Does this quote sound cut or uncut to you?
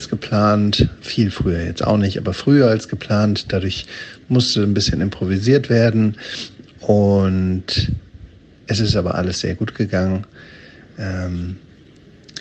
uncut